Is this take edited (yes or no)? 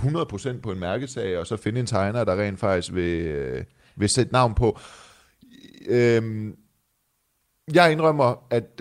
no